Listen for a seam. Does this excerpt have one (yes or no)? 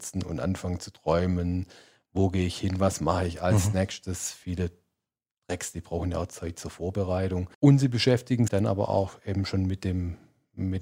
yes